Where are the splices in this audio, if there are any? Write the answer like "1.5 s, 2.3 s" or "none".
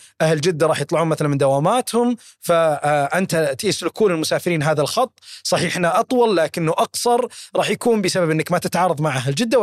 none